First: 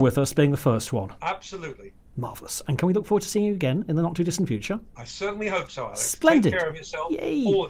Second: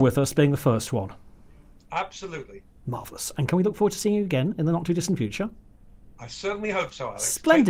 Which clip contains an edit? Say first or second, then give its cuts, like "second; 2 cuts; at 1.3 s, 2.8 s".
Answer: first; 2 cuts; at 1.2 s, 4.9 s